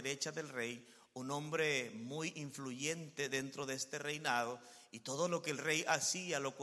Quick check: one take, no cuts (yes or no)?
yes